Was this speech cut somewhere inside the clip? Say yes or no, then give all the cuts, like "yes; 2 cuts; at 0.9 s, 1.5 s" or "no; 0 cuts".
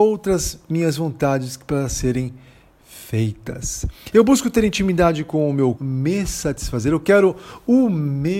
yes; 1 cut; at 5.8 s